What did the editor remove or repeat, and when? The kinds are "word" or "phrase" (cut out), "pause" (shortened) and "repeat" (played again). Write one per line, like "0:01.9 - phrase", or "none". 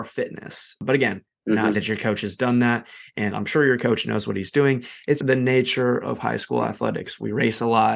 0:01.7 - word
0:05.2 - word